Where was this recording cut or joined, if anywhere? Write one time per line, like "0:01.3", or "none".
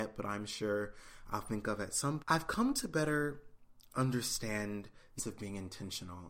0:02.2
0:05.2